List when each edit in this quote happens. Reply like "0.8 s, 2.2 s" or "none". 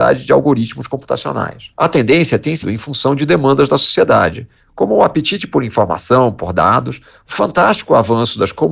2.6 s